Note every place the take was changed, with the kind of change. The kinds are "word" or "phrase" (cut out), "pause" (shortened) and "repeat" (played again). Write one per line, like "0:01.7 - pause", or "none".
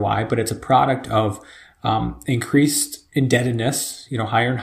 none